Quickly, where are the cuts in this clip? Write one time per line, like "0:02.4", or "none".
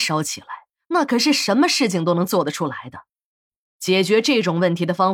none